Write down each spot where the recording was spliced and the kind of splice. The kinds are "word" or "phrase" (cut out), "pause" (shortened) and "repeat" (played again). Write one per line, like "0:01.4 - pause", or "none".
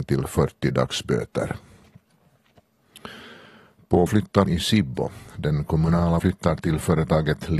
0:04.1 - word
0:04.5 - word
0:06.2 - word